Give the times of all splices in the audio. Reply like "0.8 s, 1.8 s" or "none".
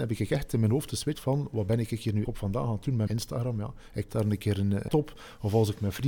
1.1 s, 2.2 s, 3.1 s, 4.1 s, 4.9 s